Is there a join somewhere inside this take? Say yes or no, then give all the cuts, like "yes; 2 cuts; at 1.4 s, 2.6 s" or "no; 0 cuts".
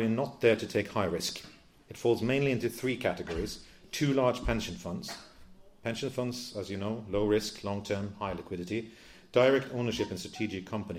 no; 0 cuts